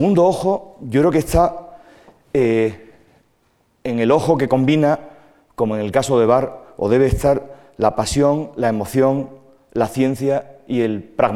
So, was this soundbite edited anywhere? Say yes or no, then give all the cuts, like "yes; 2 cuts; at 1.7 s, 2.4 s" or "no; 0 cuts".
no; 0 cuts